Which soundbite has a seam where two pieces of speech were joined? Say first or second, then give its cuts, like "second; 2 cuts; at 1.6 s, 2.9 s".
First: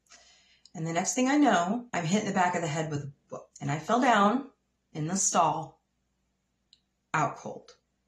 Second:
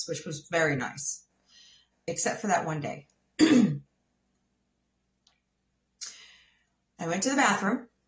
first; 3 cuts; at 1.9 s, 3.5 s, 4.7 s